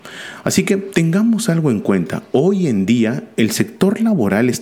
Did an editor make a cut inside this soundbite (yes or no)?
no